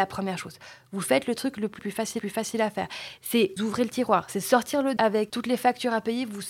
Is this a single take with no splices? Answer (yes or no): no